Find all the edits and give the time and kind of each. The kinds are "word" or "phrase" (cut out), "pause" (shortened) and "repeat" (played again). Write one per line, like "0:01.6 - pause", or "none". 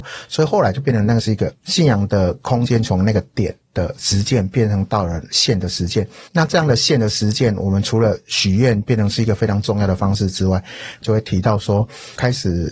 0:06.3 - pause